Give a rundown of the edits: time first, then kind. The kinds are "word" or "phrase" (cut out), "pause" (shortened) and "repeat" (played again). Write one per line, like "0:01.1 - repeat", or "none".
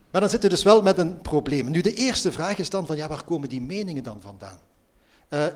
none